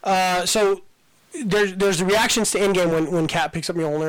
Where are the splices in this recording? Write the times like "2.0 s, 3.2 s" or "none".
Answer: none